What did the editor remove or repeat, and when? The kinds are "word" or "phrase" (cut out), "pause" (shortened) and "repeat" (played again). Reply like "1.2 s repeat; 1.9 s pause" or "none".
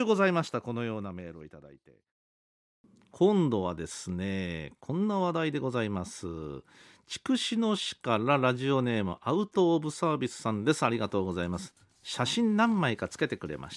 none